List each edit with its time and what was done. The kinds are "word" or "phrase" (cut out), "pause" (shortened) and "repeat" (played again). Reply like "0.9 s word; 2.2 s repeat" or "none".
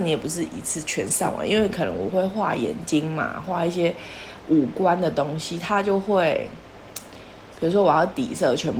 none